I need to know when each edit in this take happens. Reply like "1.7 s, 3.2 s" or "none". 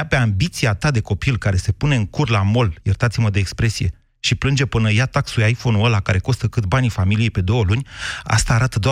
none